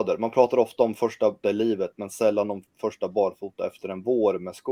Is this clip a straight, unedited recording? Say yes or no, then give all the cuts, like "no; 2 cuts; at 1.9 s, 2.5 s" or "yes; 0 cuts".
no; 1 cut; at 1.4 s